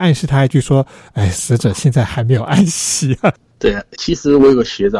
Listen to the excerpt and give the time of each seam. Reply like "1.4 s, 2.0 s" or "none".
4.0 s

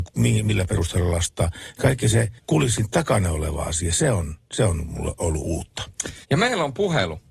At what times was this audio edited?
2.4 s, 6.2 s

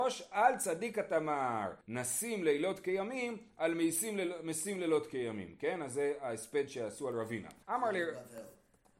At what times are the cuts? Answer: 1.8 s, 7.6 s

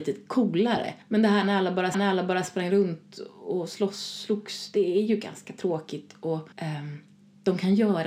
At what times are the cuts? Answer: 1.0 s, 1.9 s, 6.5 s

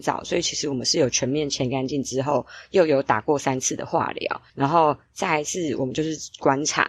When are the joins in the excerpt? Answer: 4.5 s

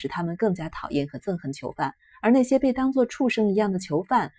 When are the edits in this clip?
none

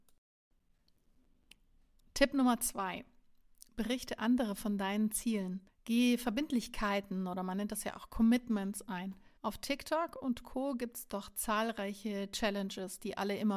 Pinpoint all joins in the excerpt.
5.7 s, 9.4 s

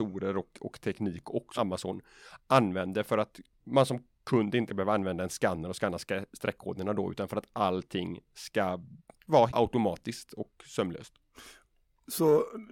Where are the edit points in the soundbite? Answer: 1.6 s, 4.7 s, 9.5 s

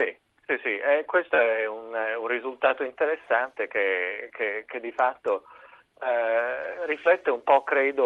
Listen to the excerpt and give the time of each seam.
none

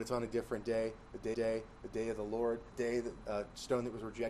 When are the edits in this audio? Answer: 1.3 s, 2.7 s, 3.2 s

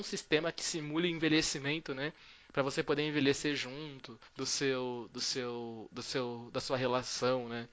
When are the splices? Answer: 4.3 s

